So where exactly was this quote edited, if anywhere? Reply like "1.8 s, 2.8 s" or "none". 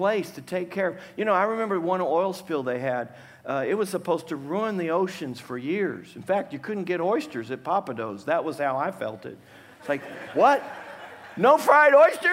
none